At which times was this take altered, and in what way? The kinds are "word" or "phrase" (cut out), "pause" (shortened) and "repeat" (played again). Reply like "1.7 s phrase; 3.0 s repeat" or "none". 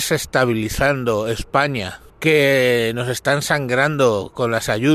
2.1 s pause